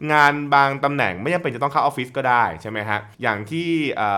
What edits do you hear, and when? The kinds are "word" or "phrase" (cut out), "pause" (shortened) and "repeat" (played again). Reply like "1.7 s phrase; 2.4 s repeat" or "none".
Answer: 3.1 s pause